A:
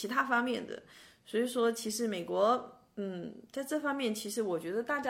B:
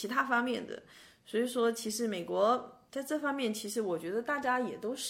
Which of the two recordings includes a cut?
B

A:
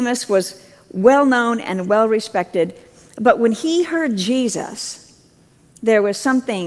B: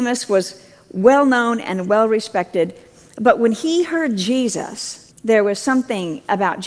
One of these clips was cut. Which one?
B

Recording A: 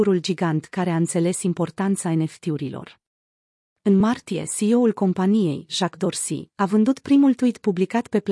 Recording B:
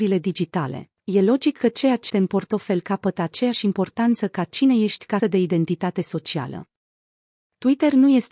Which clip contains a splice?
B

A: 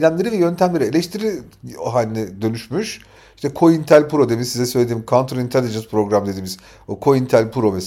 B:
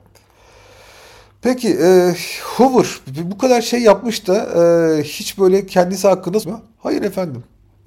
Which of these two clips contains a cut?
B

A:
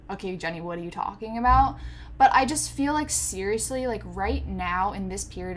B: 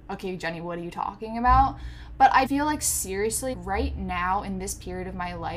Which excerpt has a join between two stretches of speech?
B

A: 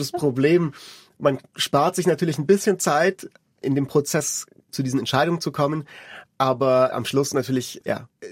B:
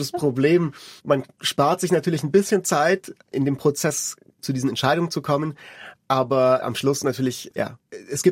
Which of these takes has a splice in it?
B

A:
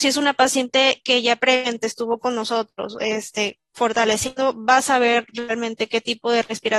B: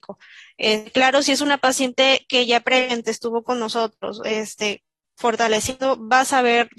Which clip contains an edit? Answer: A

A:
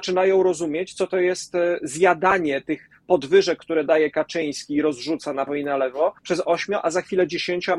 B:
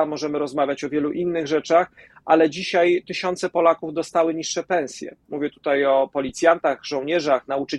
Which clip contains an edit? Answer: A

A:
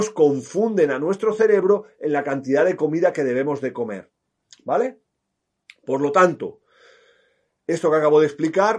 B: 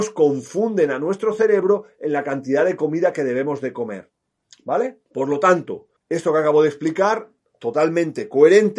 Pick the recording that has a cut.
B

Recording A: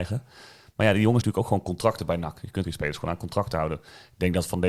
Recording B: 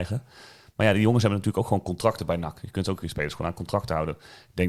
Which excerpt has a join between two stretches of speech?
A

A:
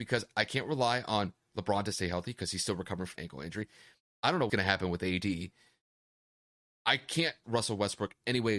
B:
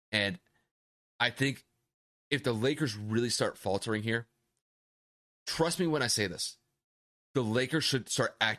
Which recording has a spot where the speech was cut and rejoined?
A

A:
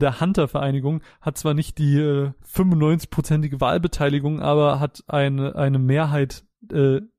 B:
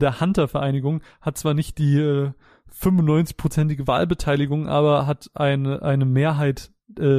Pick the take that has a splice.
A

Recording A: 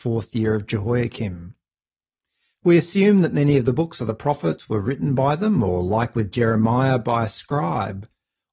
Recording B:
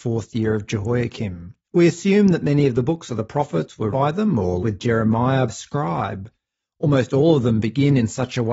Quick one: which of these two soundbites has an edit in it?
B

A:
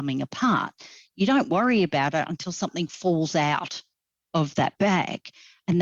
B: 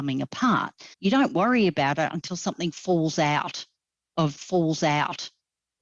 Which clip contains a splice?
B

